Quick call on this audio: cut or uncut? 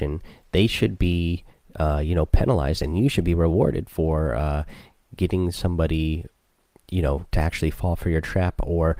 uncut